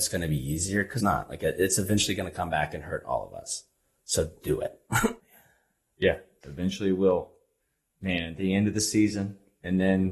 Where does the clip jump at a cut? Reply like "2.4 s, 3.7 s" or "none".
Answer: 1.0 s, 4.4 s, 5.2 s